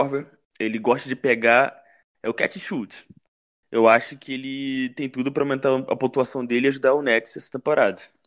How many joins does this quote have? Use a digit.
0